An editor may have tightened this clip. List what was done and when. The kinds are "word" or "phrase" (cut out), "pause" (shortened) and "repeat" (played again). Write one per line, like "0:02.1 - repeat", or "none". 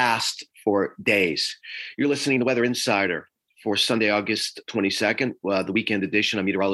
none

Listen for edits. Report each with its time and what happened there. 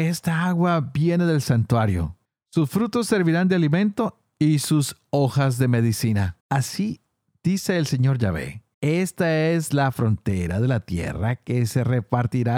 0:02.2 - pause
0:06.4 - pause
0:08.7 - pause

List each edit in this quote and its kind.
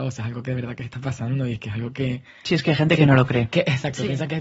none

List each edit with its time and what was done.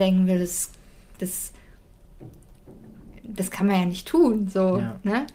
none

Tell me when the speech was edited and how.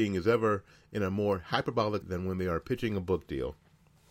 0:02.0 - word

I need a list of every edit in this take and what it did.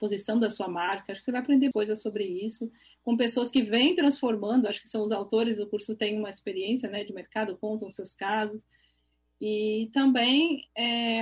0:01.7 - word

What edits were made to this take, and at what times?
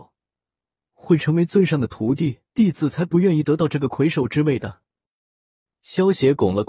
0:02.5 - pause
0:04.9 - pause

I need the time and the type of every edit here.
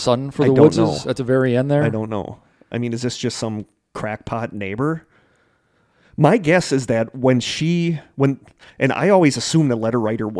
none

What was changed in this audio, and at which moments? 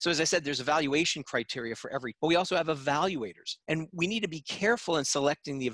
0:02.1 - word
0:03.6 - pause

